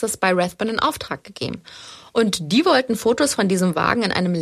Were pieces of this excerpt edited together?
no; 0 cuts

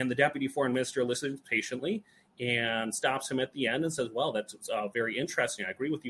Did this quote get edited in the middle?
no; 0 cuts

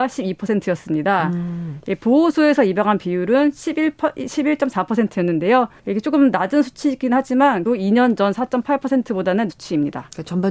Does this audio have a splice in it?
yes; 3 cuts; at 5.8 s, 7.7 s, 9.5 s

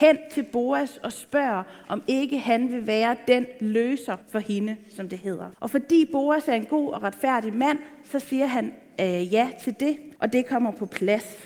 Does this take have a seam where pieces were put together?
yes; 3 cuts; at 4.2 s, 5.5 s, 10.2 s

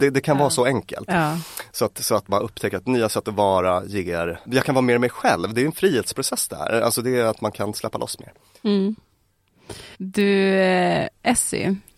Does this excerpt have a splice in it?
yes; 3 cuts; at 2.3 s, 4.5 s, 9.9 s

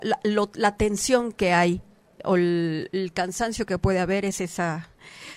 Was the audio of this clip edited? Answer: no; 0 cuts

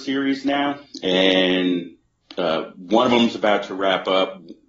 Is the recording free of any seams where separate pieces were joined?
yes; 0 cuts

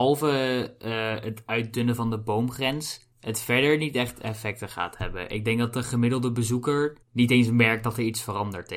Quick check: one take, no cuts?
no; 2 cuts; at 3.1 s, 7.0 s

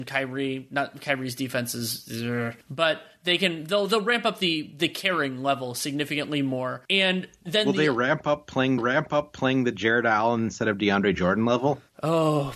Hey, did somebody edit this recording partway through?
yes; 2 cuts; at 6.8 s, 8.8 s

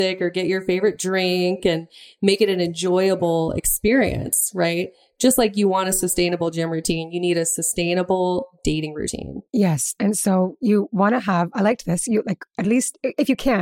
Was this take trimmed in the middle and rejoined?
yes; 1 cut; at 9.5 s

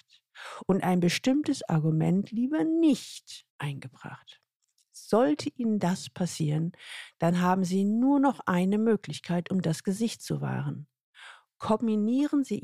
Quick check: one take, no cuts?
no; 1 cut; at 3.5 s

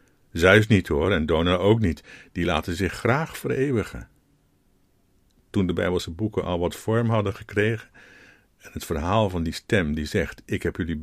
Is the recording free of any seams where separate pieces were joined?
yes; 0 cuts

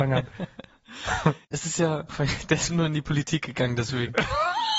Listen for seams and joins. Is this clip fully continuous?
no; 1 cut; at 2.7 s

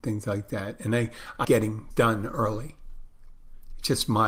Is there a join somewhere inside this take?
yes; 2 cuts; at 1.4 s, 1.9 s

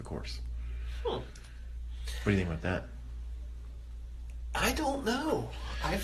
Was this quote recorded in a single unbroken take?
yes; 0 cuts

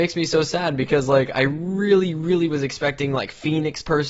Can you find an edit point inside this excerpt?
no; 0 cuts

